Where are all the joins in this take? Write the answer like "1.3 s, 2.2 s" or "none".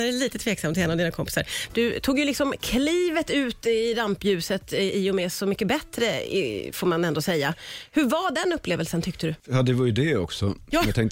none